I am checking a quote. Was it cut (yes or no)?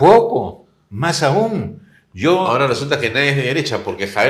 no